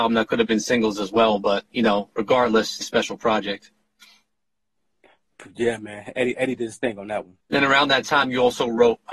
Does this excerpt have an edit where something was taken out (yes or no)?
yes